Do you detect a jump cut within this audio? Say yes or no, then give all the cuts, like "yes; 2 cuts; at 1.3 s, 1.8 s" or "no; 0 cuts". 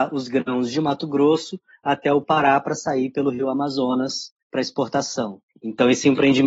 no; 0 cuts